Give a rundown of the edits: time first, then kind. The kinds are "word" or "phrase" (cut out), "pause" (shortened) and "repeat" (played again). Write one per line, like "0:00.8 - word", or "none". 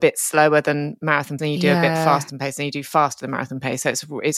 0:01.4 - word
0:02.3 - word